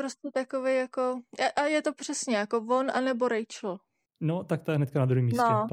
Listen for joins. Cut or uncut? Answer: cut